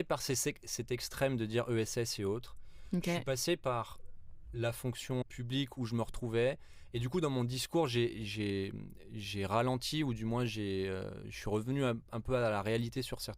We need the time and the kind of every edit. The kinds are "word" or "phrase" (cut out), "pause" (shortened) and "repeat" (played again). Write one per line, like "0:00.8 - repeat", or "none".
0:05.2 - word